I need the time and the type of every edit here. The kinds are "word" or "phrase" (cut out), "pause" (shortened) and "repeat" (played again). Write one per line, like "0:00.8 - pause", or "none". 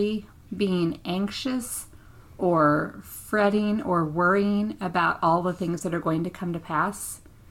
none